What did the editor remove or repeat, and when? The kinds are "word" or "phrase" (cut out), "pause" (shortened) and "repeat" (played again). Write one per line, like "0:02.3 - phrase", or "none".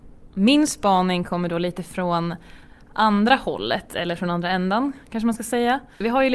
none